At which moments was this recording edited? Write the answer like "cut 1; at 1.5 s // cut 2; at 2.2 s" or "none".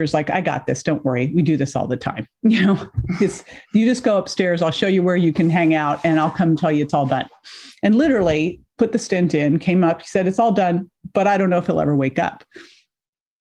none